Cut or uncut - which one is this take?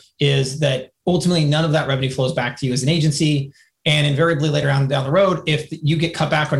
uncut